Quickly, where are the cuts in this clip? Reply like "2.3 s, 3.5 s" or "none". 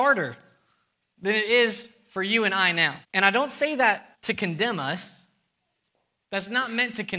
3.0 s, 4.1 s